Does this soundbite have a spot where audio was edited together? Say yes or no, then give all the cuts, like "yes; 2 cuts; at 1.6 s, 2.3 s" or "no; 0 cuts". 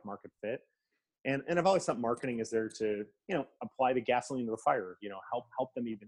no; 0 cuts